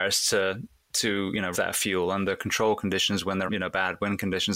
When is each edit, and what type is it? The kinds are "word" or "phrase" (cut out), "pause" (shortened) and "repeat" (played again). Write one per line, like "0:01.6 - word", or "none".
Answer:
0:01.5 - word
0:03.5 - word